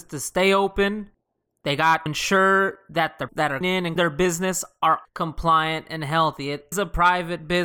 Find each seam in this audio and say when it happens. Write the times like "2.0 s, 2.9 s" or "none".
2.1 s, 3.3 s, 3.6 s, 4.0 s, 5.0 s, 6.7 s